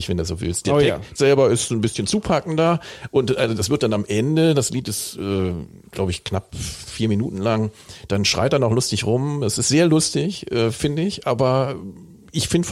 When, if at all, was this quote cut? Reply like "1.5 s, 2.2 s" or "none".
1.2 s